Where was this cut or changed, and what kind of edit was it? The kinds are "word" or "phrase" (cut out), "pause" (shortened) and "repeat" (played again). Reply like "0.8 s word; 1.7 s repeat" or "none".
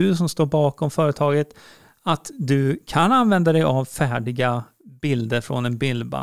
none